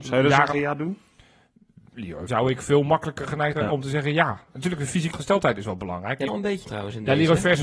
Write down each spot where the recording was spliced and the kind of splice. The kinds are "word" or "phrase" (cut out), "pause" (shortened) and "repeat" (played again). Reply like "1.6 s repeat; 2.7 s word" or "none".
2.3 s word; 3.5 s word; 5.1 s word; 6.3 s word; 6.6 s word